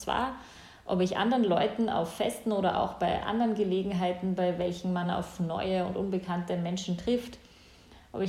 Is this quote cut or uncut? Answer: uncut